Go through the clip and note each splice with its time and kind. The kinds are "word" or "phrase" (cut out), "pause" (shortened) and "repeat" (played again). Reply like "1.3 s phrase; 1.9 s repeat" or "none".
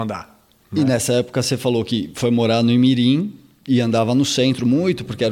none